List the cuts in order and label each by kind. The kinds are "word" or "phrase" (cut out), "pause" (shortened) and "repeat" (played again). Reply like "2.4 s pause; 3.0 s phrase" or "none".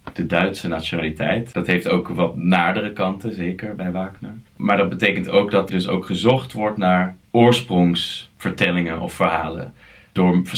4.5 s pause; 5.7 s word; 7.2 s pause

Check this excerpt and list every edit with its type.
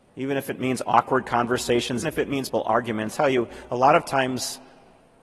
2.0 s word; 2.5 s word; 3.1 s word

